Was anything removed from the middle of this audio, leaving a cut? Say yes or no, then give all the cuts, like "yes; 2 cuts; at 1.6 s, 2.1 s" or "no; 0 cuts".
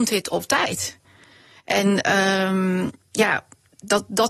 no; 0 cuts